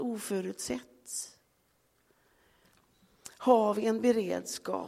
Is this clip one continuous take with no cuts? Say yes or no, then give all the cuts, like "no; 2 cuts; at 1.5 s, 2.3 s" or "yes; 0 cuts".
yes; 0 cuts